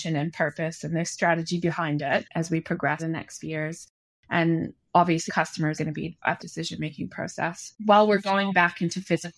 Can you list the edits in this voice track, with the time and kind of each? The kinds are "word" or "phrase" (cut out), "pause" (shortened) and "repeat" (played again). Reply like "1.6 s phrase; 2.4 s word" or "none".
3.0 s word; 3.4 s word; 5.3 s word; 5.8 s word; 6.4 s phrase; 7.8 s pause